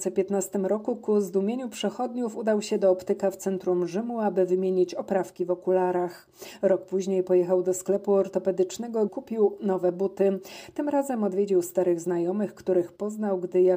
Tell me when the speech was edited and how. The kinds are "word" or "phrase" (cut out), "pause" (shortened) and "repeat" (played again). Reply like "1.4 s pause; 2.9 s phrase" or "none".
9.1 s word